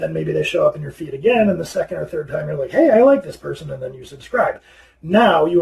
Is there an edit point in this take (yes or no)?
no